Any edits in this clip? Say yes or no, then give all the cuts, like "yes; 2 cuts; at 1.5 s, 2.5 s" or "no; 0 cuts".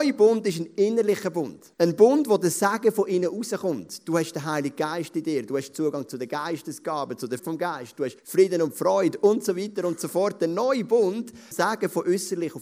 yes; 4 cuts; at 1.7 s, 7.4 s, 8.2 s, 11.5 s